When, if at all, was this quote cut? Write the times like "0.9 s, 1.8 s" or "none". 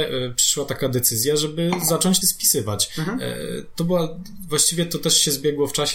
2.2 s